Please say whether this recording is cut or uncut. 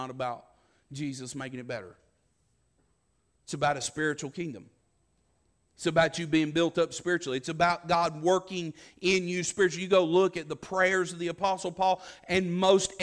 uncut